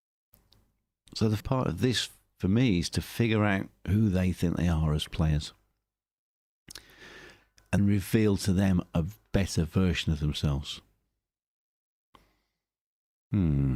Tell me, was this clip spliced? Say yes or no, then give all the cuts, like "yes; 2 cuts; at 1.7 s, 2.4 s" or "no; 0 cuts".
yes; 2 cuts; at 1.4 s, 7.8 s